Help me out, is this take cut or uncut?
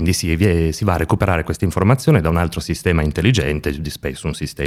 uncut